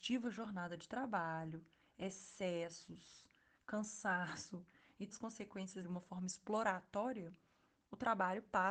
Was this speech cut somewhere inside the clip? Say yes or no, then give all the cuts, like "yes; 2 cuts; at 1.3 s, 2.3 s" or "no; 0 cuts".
yes; 2 cuts; at 5.1 s, 5.8 s